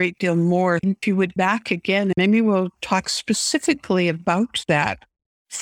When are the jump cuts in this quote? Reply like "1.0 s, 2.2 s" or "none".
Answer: 1.4 s